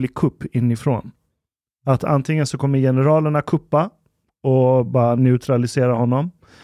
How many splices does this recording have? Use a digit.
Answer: 0